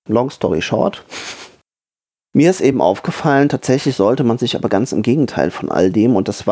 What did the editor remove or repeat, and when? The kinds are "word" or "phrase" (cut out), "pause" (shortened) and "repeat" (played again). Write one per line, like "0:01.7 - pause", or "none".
none